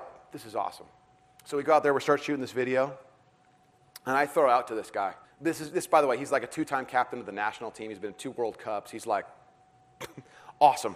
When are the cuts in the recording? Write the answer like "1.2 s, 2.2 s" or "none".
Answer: 5.2 s